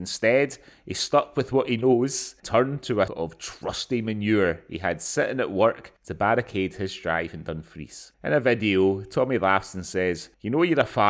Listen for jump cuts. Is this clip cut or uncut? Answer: cut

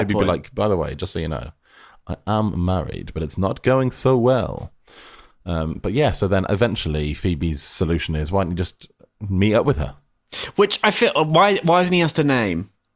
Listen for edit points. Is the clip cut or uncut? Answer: uncut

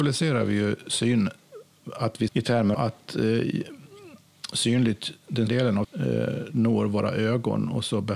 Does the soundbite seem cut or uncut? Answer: cut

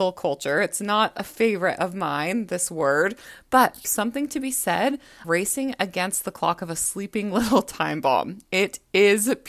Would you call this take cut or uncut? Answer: cut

